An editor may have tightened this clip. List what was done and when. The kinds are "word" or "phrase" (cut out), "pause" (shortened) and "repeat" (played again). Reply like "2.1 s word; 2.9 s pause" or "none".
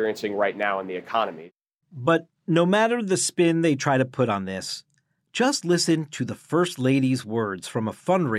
none